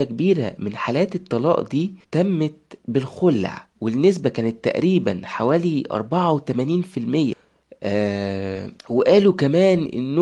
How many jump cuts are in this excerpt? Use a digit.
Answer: 3